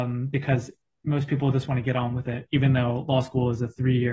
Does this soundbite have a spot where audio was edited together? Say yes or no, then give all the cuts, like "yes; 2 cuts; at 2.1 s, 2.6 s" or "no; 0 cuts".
no; 0 cuts